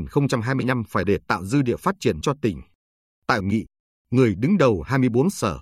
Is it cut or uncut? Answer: cut